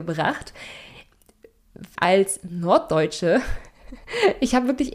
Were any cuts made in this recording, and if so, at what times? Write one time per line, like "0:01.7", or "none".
0:02.0